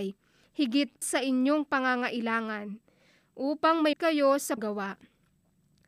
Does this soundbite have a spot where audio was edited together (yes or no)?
yes